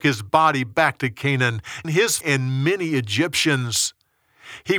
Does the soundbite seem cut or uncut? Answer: cut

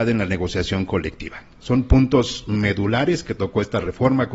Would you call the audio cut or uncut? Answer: uncut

